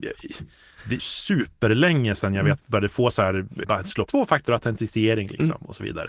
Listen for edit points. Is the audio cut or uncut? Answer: cut